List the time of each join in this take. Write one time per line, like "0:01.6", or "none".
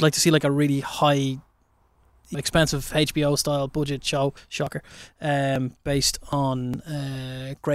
0:02.3
0:04.4